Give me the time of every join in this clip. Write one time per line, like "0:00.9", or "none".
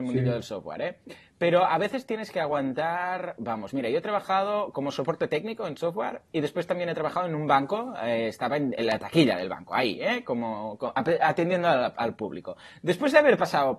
none